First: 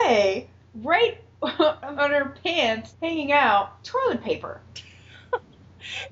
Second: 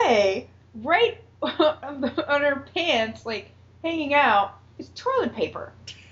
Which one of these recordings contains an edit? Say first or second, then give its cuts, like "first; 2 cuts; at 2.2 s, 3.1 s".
first; 3 cuts; at 1.9 s, 2.9 s, 3.8 s